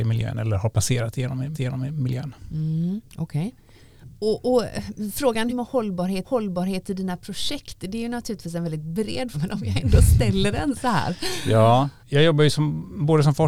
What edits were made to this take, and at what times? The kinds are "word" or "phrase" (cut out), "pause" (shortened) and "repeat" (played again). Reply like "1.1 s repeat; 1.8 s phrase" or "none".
1.5 s repeat; 4.1 s pause; 5.5 s phrase; 6.2 s repeat; 9.3 s word; 12.0 s pause